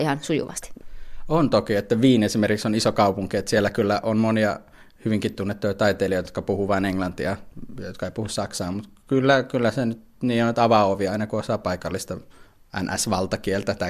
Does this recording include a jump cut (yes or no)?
no